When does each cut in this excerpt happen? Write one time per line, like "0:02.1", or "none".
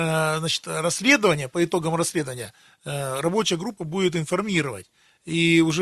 none